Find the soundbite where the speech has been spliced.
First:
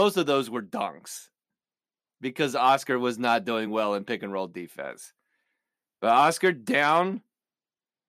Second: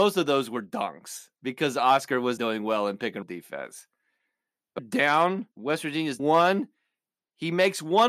second; 6 cuts; at 1.4 s, 2.4 s, 3.2 s, 4.8 s, 5.5 s, 6.2 s

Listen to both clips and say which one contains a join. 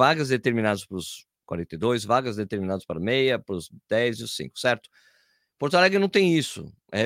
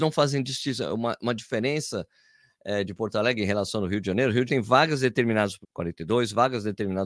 second; 2 cuts; at 4.5 s, 5.6 s

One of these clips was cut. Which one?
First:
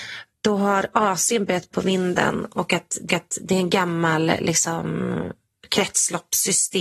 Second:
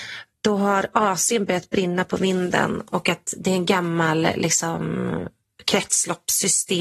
first; 2 cuts; at 1.7 s, 3.1 s

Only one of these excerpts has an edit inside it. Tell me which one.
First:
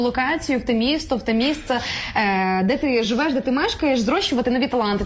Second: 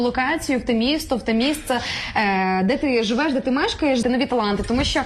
second; 1 cut; at 4.0 s

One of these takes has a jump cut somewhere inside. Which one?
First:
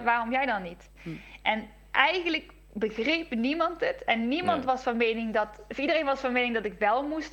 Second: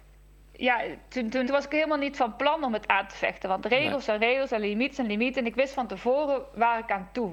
second; 1 cut; at 1.5 s

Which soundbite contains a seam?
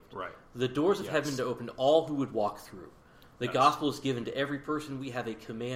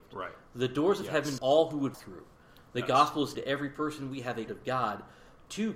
second; 4 cuts; at 1.4 s, 1.9 s, 3.3 s, 4.5 s

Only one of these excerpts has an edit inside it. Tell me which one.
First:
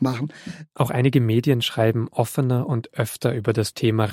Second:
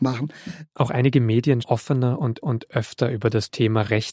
second; 2 cuts; at 1.6 s, 2.4 s

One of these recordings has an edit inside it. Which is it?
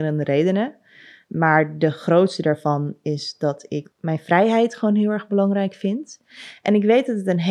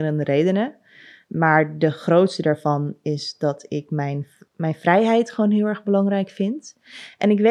first; 1 cut; at 3.8 s

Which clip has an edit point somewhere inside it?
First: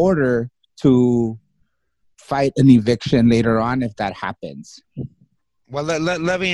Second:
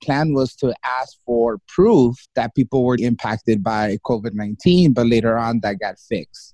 second; 2 cuts; at 2.2 s, 3.0 s

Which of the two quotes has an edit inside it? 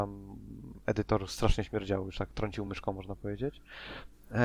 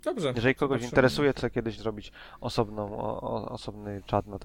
second; 2 cuts; at 1.4 s, 1.8 s

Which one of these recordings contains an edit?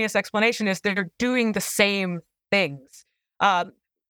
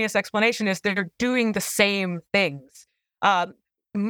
second; 1 cut; at 2.3 s

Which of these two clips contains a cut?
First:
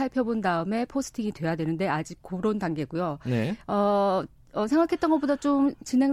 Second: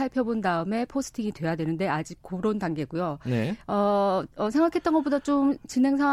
second; 1 cut; at 4.3 s

